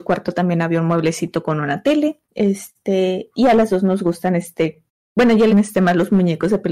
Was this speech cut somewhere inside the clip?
yes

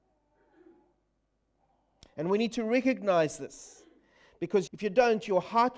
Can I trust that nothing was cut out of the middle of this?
no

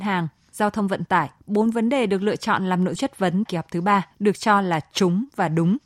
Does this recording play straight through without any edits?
no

